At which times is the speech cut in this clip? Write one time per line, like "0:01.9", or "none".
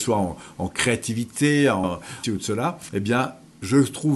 0:01.8
0:02.2